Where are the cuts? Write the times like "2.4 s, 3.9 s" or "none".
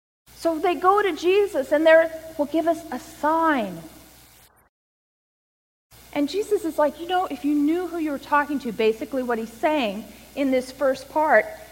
none